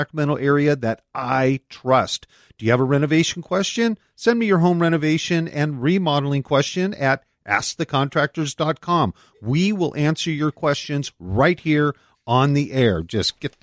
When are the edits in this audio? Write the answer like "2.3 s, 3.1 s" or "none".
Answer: none